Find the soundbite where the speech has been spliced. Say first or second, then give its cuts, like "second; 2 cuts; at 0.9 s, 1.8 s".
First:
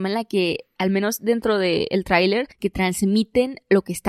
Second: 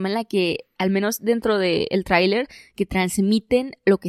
first; 1 cut; at 2.5 s